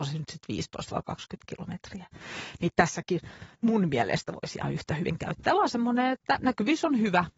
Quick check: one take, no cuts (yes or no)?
no